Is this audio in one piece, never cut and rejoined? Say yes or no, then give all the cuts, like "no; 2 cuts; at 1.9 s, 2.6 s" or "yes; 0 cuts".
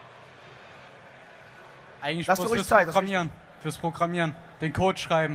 yes; 0 cuts